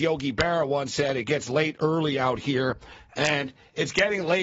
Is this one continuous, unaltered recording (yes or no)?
yes